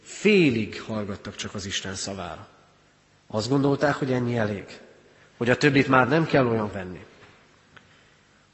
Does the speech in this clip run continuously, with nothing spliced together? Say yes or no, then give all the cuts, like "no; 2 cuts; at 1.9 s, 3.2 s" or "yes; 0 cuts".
no; 1 cut; at 6.7 s